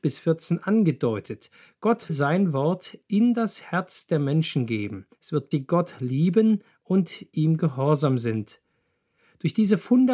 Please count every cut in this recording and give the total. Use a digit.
3